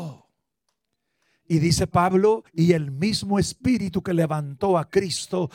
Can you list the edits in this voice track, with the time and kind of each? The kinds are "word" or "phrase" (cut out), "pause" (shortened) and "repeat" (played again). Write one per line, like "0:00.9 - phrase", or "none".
0:02.5 - pause